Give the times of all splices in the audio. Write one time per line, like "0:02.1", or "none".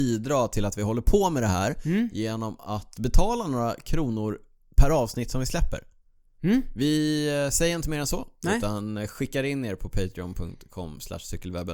none